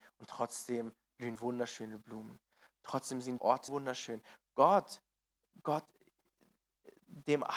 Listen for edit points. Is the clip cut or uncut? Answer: cut